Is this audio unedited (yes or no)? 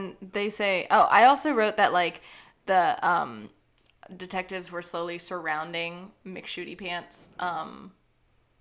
yes